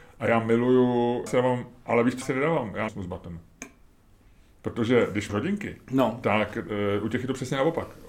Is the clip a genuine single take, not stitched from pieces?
no; 4 cuts; at 1.3 s, 2.2 s, 2.9 s, 5.3 s

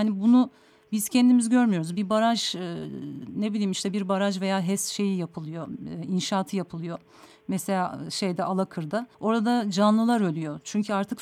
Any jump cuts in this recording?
yes; 1 cut; at 9.1 s

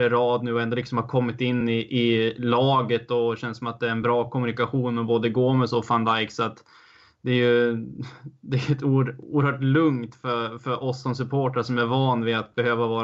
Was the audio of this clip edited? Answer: no; 0 cuts

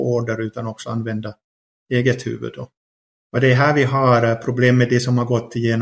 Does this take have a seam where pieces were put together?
no; 0 cuts

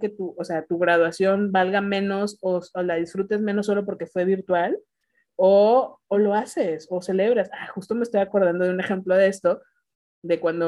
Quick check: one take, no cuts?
yes; 0 cuts

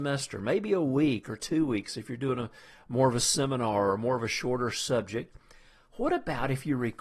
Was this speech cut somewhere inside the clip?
no; 0 cuts

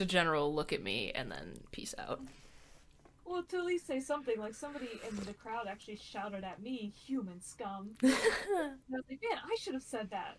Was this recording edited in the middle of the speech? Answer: yes; 2 cuts; at 3.1 s, 8.8 s

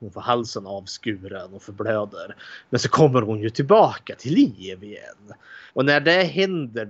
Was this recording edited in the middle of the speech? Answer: yes; 1 cut; at 5.7 s

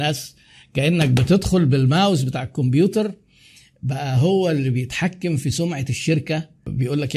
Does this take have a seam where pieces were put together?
no; 0 cuts

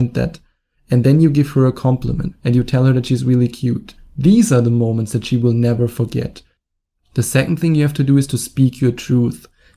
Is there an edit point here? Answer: no; 0 cuts

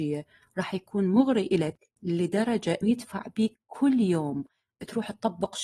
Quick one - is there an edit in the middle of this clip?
yes; 1 cut; at 2.8 s

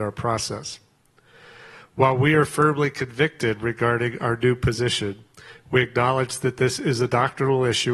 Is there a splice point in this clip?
no; 0 cuts

